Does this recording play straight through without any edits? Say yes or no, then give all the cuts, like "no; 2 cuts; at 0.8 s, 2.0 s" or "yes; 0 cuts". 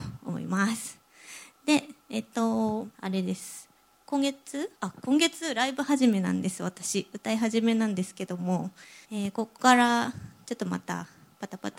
no; 4 cuts; at 2.9 s, 3.8 s, 4.8 s, 9.0 s